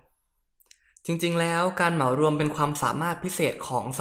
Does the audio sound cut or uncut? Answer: uncut